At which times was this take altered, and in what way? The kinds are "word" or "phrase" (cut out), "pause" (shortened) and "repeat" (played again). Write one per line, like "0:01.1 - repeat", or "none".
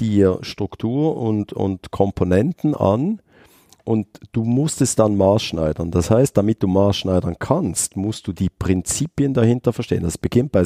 none

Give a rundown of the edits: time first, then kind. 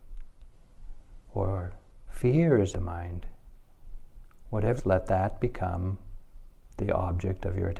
0:01.2 - pause
0:02.7 - word
0:04.8 - phrase

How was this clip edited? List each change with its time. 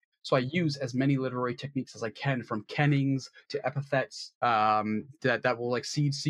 0:04.4 - pause

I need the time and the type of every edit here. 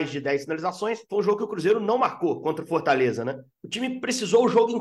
0:01.0 - pause
0:03.5 - pause

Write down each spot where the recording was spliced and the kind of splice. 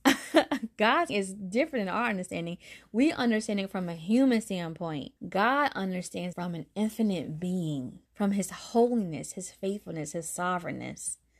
0:01.1 - word
0:05.2 - pause
0:06.3 - word
0:08.0 - pause

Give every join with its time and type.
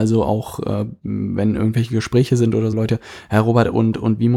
0:02.7 - phrase

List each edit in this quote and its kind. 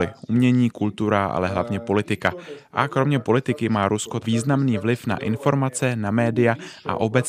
0:04.2 - word

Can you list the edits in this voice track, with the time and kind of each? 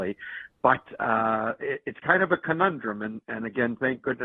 none

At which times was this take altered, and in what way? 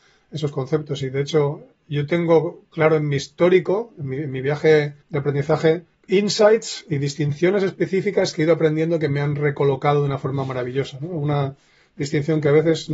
0:05.0 - pause
0:05.9 - pause

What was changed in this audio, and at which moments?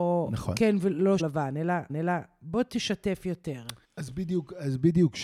0:01.2 - word
0:01.9 - repeat
0:03.8 - pause

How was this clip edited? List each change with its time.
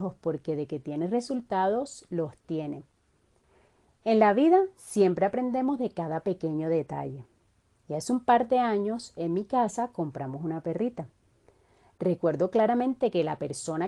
none

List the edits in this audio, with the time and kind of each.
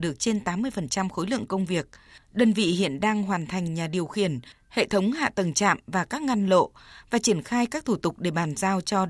none

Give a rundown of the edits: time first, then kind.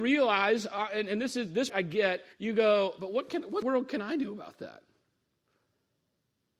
0:01.7 - word
0:02.3 - pause
0:03.6 - word

